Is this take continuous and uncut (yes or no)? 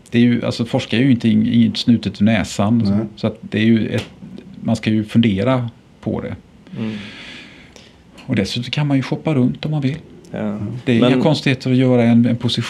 yes